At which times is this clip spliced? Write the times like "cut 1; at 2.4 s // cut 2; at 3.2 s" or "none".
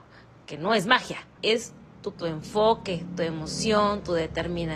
cut 1; at 1.4 s // cut 2; at 2.1 s